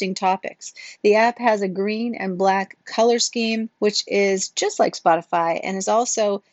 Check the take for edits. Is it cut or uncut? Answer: cut